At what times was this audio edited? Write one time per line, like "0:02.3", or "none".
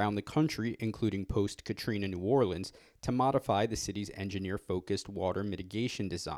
none